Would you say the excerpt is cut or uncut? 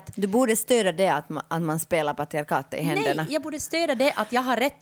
uncut